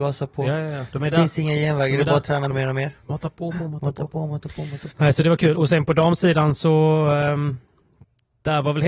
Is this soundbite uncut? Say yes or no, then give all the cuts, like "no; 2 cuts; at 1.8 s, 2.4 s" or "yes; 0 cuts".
no; 3 cuts; at 2.5 s, 3.5 s, 4.9 s